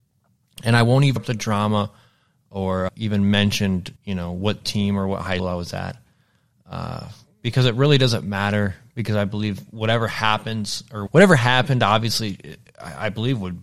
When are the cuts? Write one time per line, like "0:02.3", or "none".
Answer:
0:01.2
0:02.9
0:04.0
0:05.4
0:07.3
0:11.1